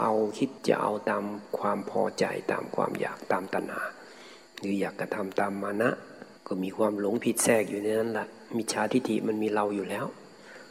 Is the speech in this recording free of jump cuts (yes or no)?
no